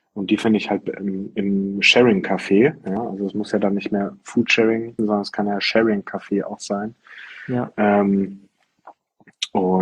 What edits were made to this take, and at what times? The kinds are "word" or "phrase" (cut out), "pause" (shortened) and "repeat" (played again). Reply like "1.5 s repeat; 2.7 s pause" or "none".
5.0 s word